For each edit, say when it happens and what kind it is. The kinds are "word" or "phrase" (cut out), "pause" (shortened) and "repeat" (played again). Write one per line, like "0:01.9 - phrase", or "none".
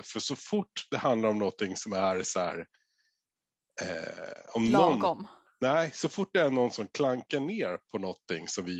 0:05.5 - pause